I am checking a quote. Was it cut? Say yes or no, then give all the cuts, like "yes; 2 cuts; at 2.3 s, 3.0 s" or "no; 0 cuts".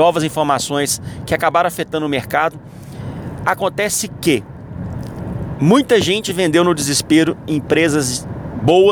no; 0 cuts